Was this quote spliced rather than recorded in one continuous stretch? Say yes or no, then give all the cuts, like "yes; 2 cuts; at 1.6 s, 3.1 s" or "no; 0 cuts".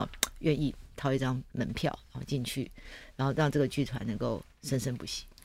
yes; 1 cut; at 1.5 s